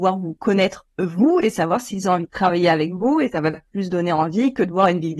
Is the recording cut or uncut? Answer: uncut